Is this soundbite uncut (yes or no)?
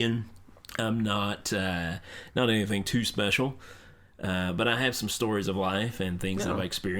yes